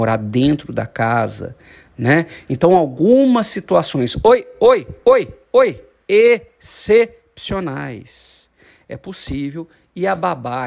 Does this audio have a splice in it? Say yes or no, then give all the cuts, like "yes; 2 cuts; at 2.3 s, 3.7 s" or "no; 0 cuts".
no; 0 cuts